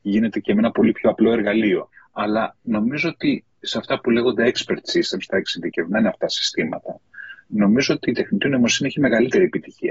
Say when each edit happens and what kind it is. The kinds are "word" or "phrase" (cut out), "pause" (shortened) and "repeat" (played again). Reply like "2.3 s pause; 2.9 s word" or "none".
none